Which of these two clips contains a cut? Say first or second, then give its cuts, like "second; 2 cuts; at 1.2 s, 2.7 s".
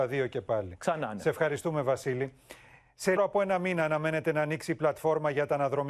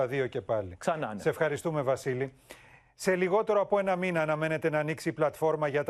first; 1 cut; at 3.2 s